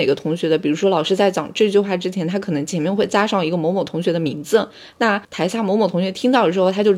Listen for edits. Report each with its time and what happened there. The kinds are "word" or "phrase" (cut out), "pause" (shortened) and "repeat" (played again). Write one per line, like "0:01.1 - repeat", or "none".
0:05.2 - pause